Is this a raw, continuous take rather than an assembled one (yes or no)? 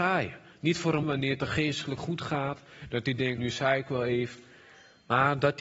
no